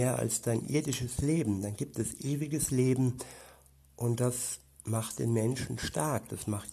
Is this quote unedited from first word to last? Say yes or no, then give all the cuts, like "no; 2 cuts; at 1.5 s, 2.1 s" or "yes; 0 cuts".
yes; 0 cuts